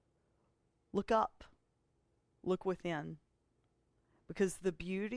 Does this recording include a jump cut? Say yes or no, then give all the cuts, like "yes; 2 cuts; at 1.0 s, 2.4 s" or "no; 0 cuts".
no; 0 cuts